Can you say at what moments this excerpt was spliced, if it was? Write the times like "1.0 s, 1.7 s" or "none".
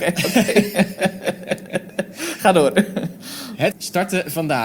3.7 s